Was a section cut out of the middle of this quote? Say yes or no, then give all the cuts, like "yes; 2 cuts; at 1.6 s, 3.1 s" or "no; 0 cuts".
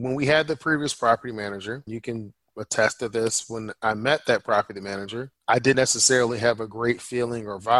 yes; 3 cuts; at 1.9 s, 5.4 s, 5.7 s